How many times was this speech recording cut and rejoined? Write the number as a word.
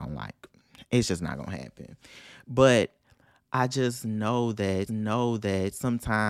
one